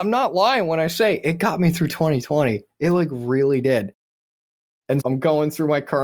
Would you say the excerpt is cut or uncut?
cut